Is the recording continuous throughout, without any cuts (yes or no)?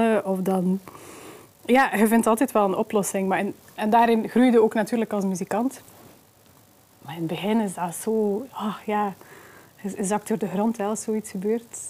yes